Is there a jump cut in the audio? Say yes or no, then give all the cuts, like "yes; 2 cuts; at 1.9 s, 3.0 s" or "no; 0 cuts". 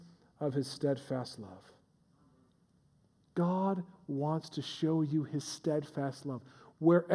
no; 0 cuts